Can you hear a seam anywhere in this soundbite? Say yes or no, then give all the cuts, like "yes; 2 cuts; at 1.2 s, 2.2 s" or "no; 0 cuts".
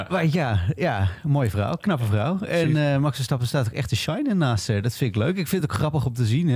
no; 0 cuts